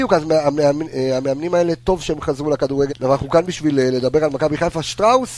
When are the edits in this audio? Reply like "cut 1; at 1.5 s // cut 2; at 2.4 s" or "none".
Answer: cut 1; at 2.9 s